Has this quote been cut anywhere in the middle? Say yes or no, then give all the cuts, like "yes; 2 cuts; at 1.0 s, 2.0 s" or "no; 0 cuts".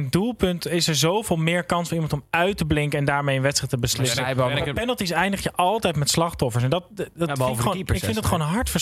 no; 0 cuts